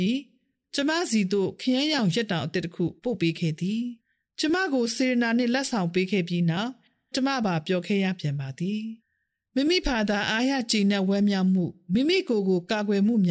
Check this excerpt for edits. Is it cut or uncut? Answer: cut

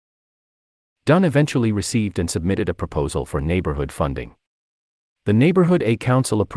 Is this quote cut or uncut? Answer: uncut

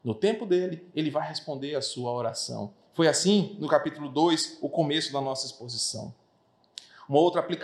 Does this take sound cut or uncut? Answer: uncut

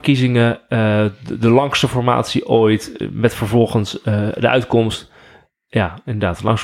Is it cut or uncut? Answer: uncut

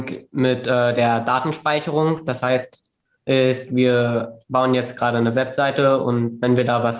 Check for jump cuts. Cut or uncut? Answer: uncut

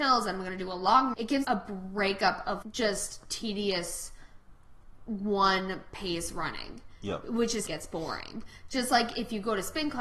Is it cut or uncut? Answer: cut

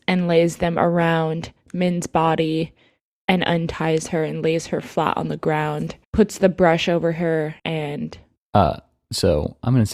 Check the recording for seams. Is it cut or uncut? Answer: cut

